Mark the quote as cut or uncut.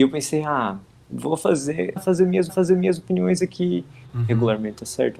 cut